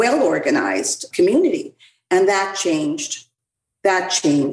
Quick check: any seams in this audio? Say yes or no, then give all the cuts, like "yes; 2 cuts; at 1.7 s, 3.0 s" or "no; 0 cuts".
no; 0 cuts